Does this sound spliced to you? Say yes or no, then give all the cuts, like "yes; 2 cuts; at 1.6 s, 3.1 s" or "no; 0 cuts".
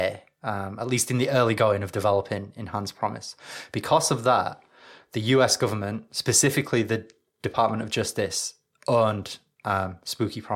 no; 0 cuts